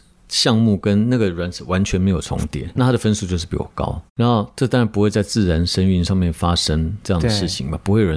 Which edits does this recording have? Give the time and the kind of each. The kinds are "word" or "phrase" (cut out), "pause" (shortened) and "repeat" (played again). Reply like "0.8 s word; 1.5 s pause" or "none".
2.8 s word; 4.1 s pause